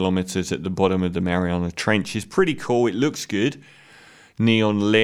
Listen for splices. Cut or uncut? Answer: uncut